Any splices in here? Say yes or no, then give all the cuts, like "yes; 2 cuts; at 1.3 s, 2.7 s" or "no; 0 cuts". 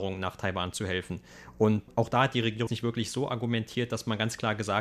yes; 1 cut; at 2.7 s